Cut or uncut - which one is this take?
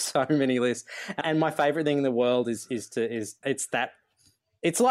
cut